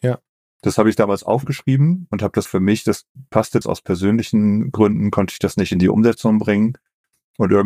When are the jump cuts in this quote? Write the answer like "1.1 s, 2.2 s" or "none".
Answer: 2.5 s, 3.6 s